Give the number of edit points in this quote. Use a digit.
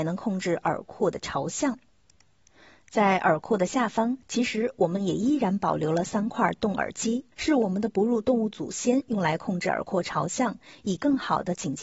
2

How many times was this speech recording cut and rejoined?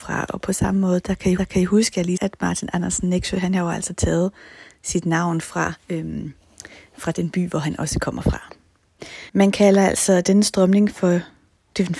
4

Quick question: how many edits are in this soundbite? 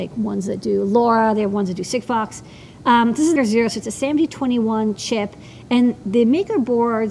2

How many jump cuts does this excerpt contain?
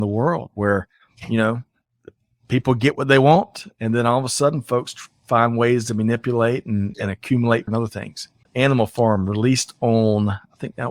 3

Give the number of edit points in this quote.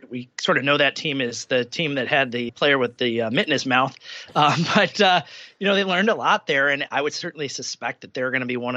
2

